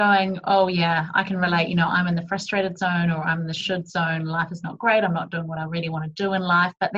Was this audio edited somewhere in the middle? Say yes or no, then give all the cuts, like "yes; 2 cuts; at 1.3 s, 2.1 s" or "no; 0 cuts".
no; 0 cuts